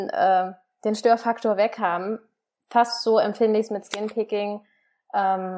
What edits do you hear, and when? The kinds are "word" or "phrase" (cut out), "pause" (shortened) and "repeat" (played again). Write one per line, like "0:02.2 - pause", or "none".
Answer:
none